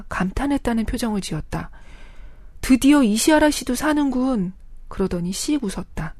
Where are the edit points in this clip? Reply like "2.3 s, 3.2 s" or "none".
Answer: none